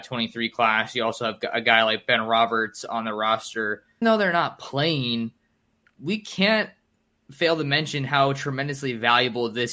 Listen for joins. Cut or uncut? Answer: cut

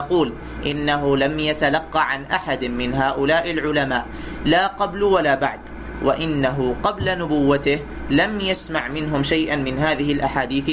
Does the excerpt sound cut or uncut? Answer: uncut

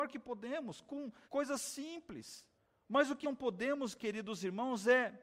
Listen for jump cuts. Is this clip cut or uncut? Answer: cut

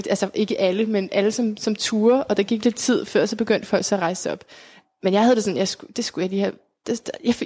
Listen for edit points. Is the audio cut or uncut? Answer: uncut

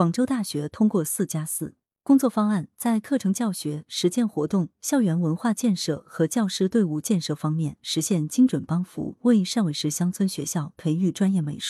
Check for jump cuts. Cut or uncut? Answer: uncut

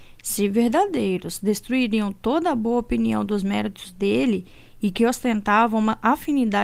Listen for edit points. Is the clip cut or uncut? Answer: uncut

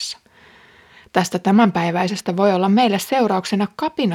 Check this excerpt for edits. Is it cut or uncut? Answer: uncut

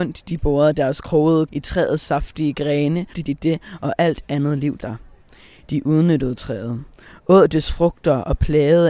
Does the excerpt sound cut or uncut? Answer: cut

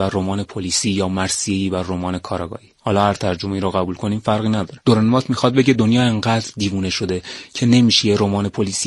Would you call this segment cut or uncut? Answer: cut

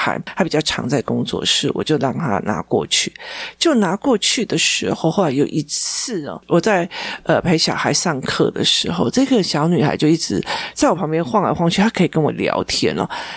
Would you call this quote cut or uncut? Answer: uncut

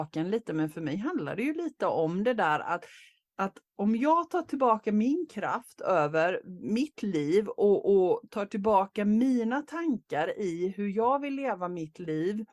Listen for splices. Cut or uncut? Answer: uncut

